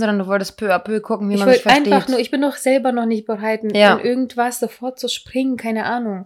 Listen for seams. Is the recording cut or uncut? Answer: uncut